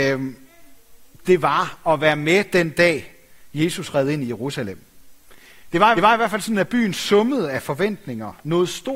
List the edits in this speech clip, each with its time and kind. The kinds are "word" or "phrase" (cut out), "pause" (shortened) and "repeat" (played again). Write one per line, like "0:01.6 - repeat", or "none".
0:06.0 - repeat

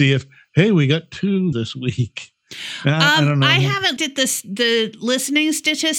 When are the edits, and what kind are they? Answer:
0:01.5 - word
0:04.0 - word

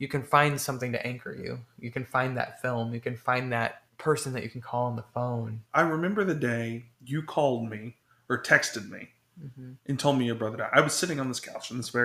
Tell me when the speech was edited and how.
0:03.9 - pause
0:05.6 - pause
0:06.9 - pause
0:08.0 - pause
0:09.8 - pause

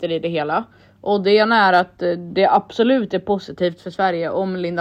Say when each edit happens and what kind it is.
none

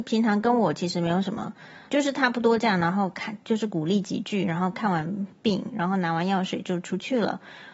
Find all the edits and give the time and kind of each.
0:01.9 - word

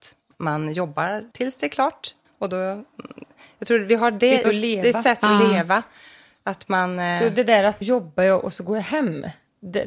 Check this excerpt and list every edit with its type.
0:01.3 - pause
0:02.2 - pause
0:04.4 - word
0:07.8 - phrase

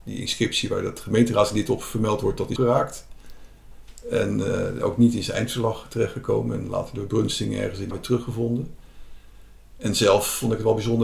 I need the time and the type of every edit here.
0:02.6 - word
0:07.9 - word

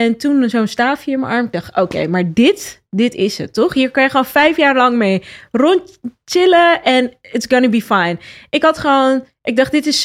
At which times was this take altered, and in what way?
none

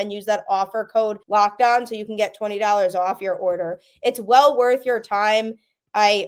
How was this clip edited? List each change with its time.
0:01.2 - pause

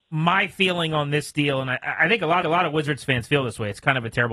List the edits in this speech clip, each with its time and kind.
0:02.4 - repeat

